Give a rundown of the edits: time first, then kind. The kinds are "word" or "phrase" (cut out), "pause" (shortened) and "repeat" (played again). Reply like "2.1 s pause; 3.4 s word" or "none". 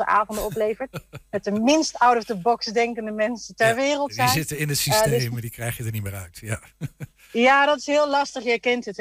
none